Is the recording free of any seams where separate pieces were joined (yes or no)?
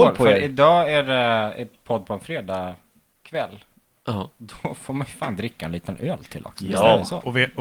yes